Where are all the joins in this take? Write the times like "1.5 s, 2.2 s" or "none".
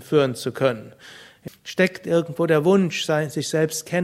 1.5 s